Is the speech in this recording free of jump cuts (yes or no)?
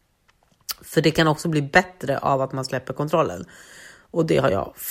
yes